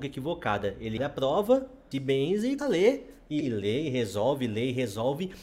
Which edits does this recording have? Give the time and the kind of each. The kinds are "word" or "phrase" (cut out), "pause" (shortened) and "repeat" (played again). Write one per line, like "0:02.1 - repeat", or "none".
0:01.0 - word
0:01.9 - word
0:02.6 - word
0:03.4 - word